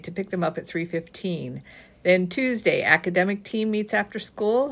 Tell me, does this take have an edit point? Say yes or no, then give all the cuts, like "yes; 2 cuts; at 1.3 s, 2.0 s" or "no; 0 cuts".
no; 0 cuts